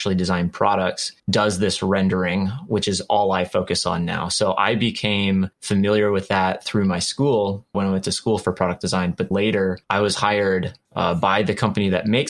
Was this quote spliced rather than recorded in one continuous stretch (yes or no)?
yes